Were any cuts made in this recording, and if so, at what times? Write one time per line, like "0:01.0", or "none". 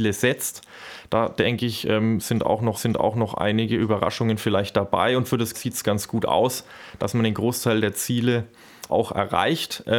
0:02.7
0:05.5
0:08.9